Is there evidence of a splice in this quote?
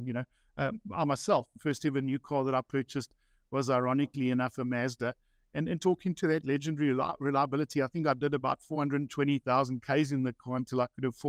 no; 0 cuts

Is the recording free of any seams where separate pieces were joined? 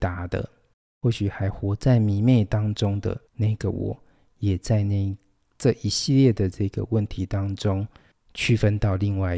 no; 2 cuts; at 3.3 s, 8.1 s

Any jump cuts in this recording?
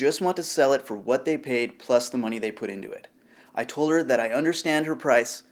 no; 0 cuts

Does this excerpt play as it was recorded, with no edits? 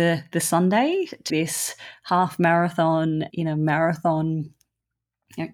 no; 2 cuts; at 1.3 s, 3.3 s

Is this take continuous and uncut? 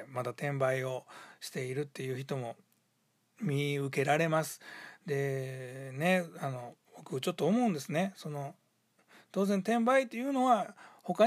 no; 1 cut; at 6.8 s

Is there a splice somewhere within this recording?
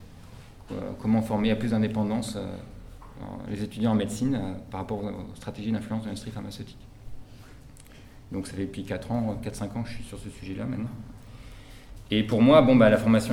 no; 0 cuts

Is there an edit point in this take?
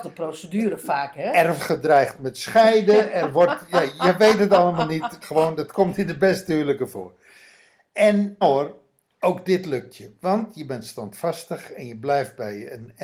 yes; 3 cuts; at 1.6 s, 5.2 s, 8.4 s

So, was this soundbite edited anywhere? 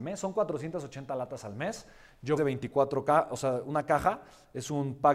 yes; 1 cut; at 2.4 s

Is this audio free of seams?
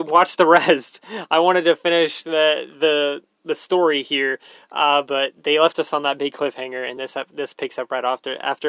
yes; 0 cuts

